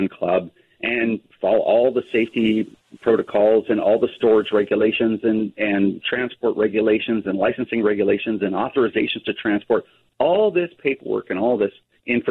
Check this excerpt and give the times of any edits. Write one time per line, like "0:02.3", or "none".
none